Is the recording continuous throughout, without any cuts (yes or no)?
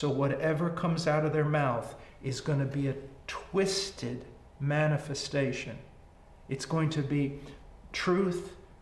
yes